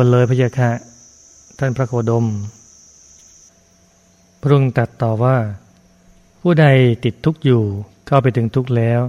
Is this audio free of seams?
yes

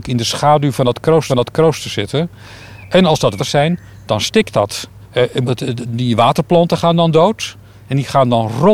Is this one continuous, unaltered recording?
no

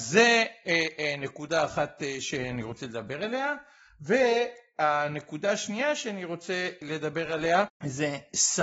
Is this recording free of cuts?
yes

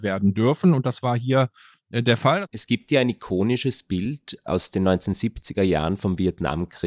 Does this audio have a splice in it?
no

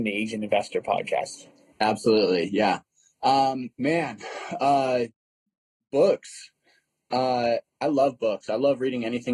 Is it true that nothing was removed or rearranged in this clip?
no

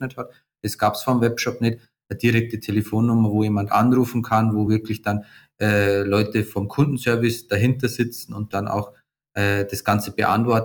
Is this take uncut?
yes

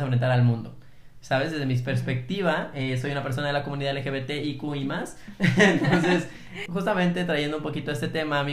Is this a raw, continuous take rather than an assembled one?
no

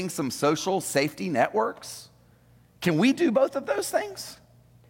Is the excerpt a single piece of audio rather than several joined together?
yes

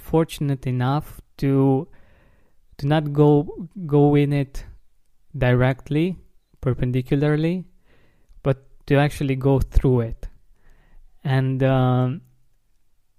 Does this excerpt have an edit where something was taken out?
no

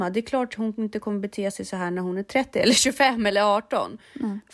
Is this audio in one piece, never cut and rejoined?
yes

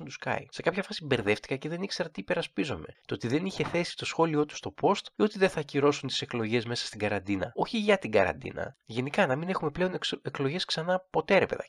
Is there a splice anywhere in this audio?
no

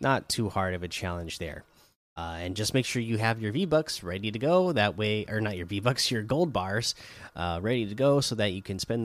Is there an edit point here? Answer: no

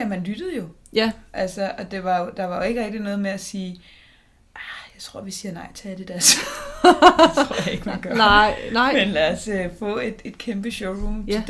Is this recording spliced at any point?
no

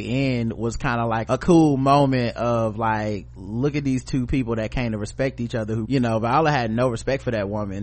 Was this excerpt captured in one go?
no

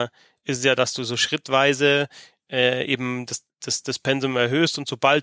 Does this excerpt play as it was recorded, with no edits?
yes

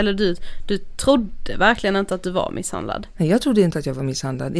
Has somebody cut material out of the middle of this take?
no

